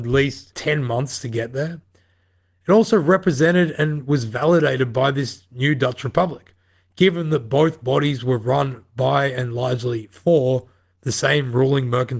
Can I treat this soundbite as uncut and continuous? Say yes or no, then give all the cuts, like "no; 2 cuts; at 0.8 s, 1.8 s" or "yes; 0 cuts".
yes; 0 cuts